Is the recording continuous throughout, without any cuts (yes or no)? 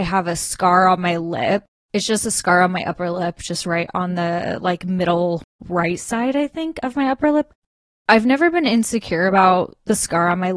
yes